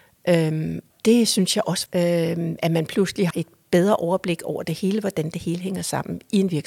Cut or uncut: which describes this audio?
cut